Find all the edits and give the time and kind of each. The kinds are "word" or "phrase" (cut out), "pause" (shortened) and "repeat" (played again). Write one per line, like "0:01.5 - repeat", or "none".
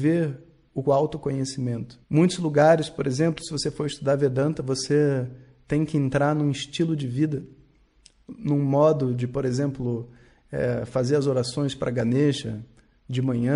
0:02.0 - pause